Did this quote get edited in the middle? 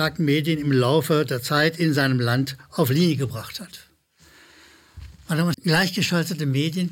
yes; 1 cut; at 5.5 s

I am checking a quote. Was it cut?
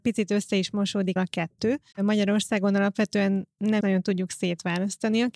yes; 3 cuts; at 1.2 s, 1.9 s, 3.8 s

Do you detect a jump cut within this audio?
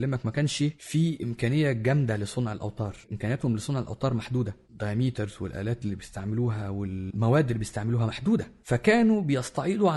yes; 1 cut; at 3.0 s

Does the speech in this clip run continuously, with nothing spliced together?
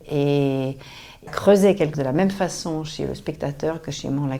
no; 2 cuts; at 1.3 s, 1.9 s

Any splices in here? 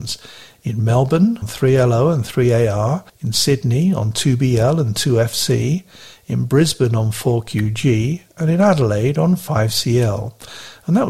yes; 2 cuts; at 1.4 s, 3.1 s

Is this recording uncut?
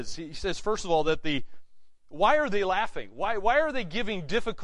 yes; 0 cuts

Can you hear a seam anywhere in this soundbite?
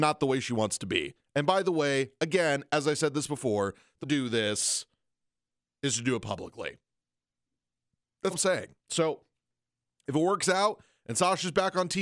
yes; 3 cuts; at 4.0 s, 8.3 s, 8.8 s

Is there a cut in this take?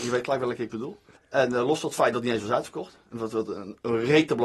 yes; 1 cut; at 1.2 s

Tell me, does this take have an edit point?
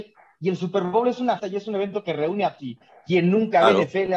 yes; 2 cuts; at 1.4 s, 2.6 s

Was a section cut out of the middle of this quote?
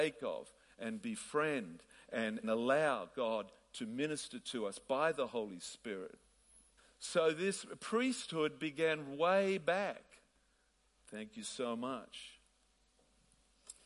yes; 2 cuts; at 2.4 s, 6.8 s

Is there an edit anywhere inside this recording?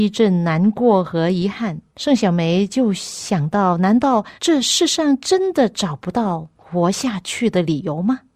yes; 2 cuts; at 1.9 s, 4.4 s

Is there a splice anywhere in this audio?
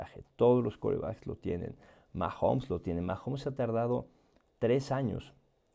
no; 0 cuts

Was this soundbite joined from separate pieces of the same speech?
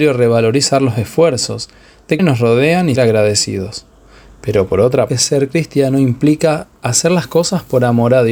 yes; 3 cuts; at 2.2 s, 3.0 s, 5.1 s

